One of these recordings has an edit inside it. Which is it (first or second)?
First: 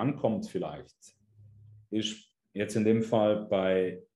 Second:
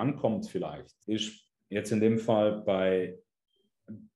second